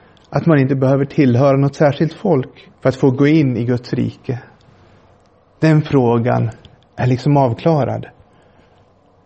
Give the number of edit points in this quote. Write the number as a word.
one